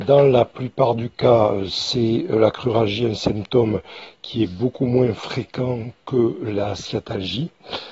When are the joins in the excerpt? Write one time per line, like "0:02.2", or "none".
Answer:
none